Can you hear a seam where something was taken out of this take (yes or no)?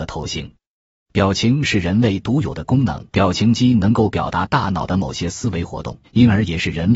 yes